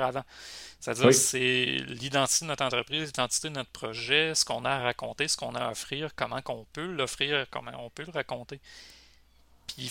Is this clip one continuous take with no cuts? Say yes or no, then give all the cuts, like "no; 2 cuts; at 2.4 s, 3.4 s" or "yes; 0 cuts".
yes; 0 cuts